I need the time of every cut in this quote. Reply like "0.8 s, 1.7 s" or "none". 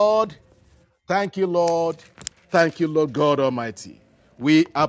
none

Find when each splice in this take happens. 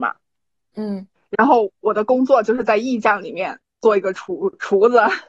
1.2 s

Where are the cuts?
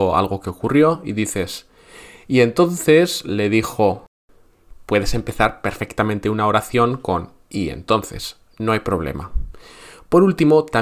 none

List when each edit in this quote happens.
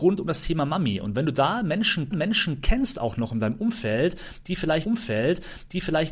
2.1 s, 4.8 s

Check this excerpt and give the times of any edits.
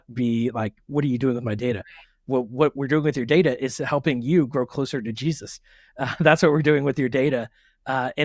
none

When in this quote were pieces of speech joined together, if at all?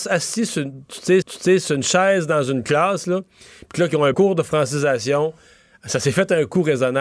1.2 s, 4.1 s

